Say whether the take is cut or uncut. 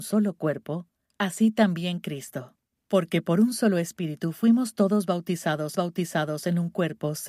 cut